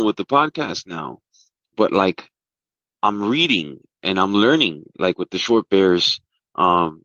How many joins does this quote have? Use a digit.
0